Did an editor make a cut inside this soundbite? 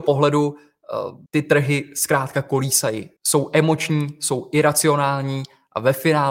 yes; 2 cuts; at 1.3 s, 3.2 s

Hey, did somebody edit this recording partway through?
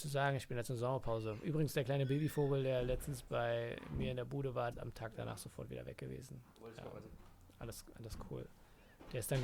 yes; 1 cut; at 4.7 s

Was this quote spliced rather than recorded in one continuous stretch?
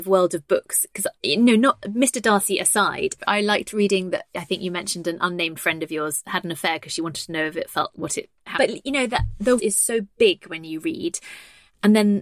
yes; 5 cuts; at 1.2 s, 3.2 s, 7.9 s, 8.5 s, 9.6 s

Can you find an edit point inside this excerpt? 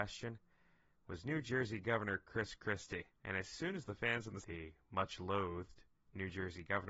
yes; 2 cuts; at 3.2 s, 4.4 s

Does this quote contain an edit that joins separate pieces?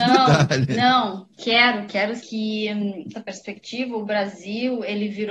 yes; 3 cuts; at 1.3 s, 2.2 s, 3.1 s

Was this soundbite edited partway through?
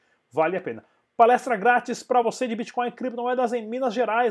no; 0 cuts

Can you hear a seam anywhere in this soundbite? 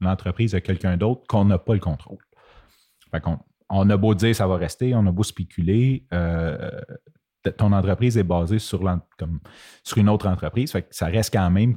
no; 0 cuts

